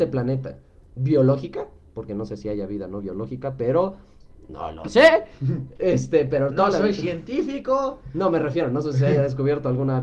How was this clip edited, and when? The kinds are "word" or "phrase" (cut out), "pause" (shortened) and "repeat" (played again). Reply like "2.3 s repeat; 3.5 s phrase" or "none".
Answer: none